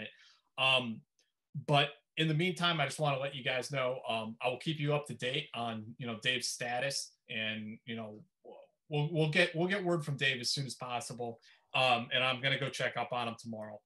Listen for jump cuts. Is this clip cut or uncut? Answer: cut